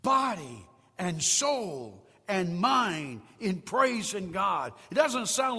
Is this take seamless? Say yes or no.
yes